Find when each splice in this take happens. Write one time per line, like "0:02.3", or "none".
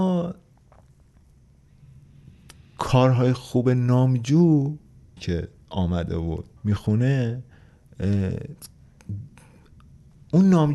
0:05.2
0:06.6